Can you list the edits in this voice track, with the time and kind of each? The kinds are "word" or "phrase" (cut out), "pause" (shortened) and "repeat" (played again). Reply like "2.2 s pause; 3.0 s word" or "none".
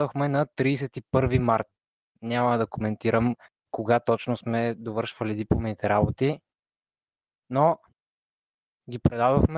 none